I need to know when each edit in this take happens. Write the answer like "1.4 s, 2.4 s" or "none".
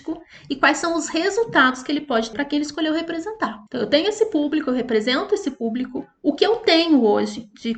2.3 s, 3.7 s

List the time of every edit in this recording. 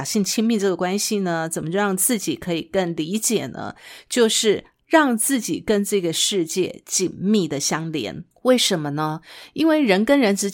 8.3 s

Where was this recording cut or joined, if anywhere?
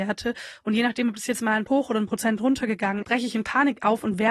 1.7 s, 3.0 s

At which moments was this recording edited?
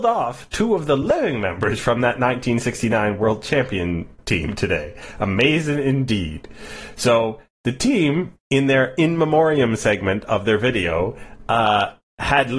none

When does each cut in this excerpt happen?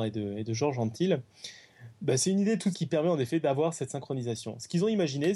2.7 s

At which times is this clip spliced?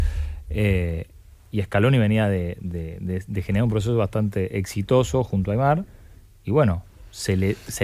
none

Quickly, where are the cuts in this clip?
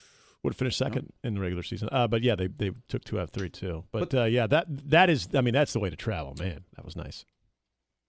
none

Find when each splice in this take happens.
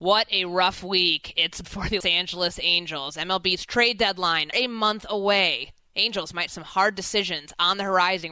1.6 s, 2.0 s, 4.5 s, 6.5 s

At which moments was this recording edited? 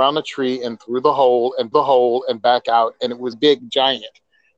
1.7 s, 3.3 s

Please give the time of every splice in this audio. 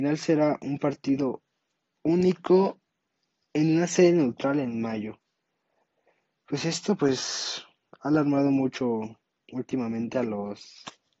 none

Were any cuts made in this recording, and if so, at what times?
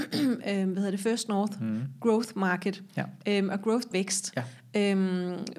3.9 s

